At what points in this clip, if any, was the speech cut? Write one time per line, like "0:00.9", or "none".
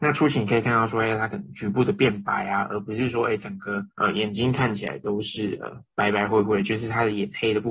0:03.9

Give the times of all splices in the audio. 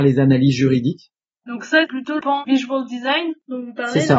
0:01.9
0:02.2

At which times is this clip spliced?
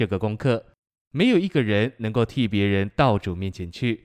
none

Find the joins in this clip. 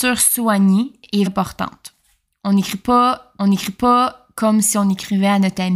0:01.3
0:03.4

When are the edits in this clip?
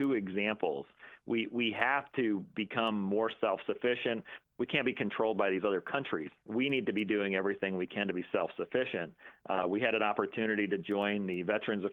none

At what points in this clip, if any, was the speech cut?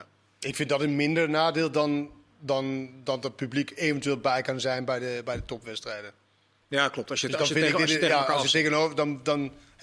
none

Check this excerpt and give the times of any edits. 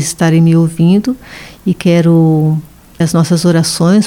0:03.0

